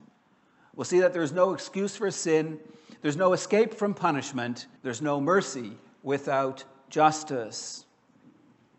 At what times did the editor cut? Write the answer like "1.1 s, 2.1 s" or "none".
4.8 s